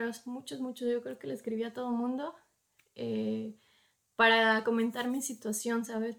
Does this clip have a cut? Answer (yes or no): no